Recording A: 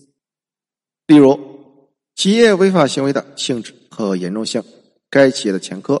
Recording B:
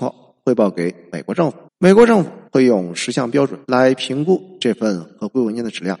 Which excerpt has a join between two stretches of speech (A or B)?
B